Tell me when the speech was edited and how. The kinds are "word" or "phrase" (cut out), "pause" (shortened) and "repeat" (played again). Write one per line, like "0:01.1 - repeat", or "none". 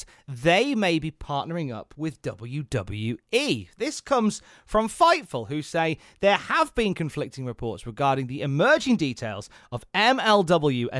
none